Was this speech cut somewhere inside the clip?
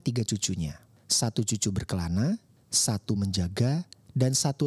no; 0 cuts

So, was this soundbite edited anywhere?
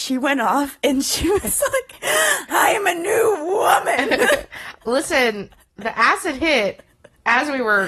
no; 0 cuts

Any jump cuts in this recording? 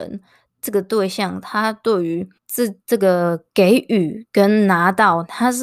yes; 1 cut; at 2.4 s

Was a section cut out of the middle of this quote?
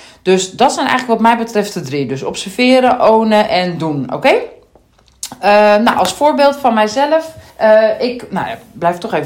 yes; 1 cut; at 7.5 s

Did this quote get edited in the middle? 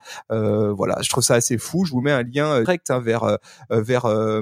yes; 1 cut; at 2.6 s

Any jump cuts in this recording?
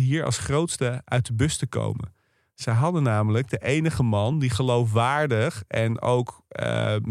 no; 0 cuts

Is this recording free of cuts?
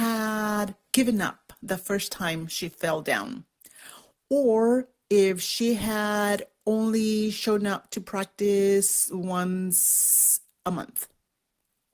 yes; 0 cuts

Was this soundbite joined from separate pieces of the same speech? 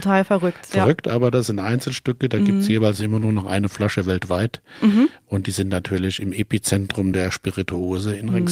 no; 0 cuts

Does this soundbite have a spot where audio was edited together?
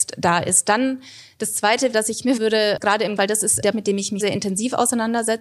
yes; 6 cuts; at 1.9 s, 2.4 s, 2.8 s, 3.2 s, 3.7 s, 4.2 s

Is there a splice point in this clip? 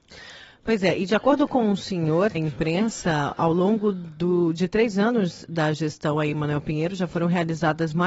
yes; 1 cut; at 2.3 s

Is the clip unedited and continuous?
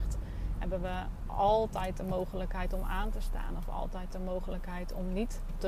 yes; 0 cuts

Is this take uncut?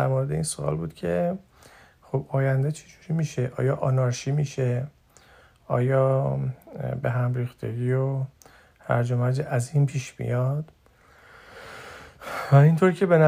yes; 0 cuts

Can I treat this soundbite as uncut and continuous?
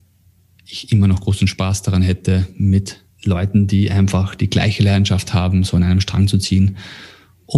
no; 1 cut; at 3.1 s

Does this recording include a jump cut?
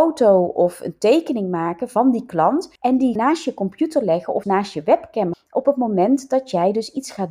yes; 4 cuts; at 2.8 s, 3.2 s, 4.4 s, 5.3 s

